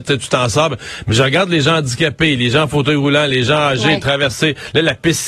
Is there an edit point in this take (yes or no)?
no